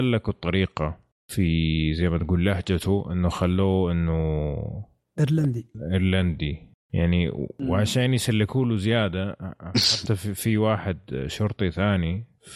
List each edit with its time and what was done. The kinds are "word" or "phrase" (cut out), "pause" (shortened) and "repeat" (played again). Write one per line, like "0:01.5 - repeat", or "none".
none